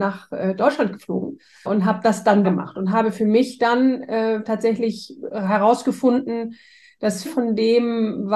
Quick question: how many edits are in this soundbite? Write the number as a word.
three